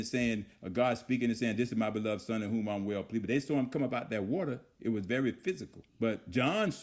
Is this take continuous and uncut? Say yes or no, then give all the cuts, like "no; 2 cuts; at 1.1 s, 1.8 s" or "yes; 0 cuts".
no; 1 cut; at 5.9 s